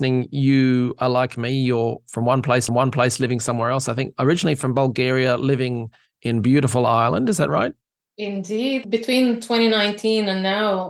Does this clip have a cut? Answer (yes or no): yes